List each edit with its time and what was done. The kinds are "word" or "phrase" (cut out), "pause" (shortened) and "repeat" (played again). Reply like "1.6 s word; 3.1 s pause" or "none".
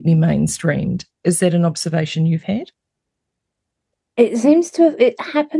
none